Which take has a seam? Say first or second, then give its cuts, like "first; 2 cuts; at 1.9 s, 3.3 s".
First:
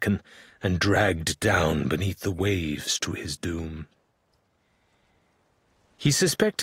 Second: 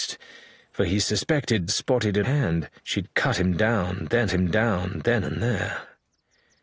second; 4 cuts; at 1.7 s, 2.2 s, 2.8 s, 4.3 s